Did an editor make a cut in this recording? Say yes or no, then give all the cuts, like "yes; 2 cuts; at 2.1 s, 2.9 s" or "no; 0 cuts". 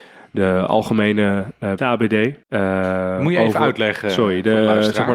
yes; 2 cuts; at 1.8 s, 2.4 s